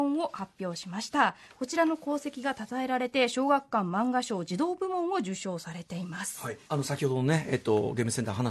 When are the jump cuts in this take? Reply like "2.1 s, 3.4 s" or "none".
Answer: 6.6 s